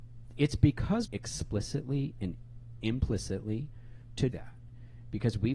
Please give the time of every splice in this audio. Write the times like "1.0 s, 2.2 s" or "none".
1.1 s, 2.8 s, 4.3 s